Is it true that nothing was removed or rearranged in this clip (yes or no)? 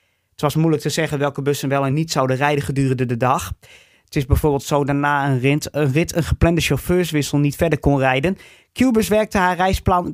yes